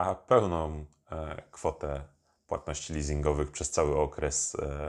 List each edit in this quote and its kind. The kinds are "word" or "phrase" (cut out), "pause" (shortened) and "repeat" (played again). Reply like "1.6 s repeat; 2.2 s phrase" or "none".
none